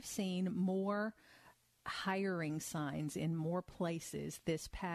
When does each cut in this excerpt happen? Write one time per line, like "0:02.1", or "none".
none